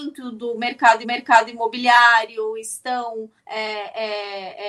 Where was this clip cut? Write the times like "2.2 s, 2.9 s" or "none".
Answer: 1.0 s, 3.4 s